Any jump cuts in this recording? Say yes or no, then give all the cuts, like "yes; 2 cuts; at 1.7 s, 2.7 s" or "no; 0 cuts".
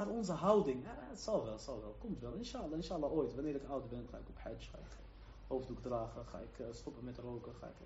no; 0 cuts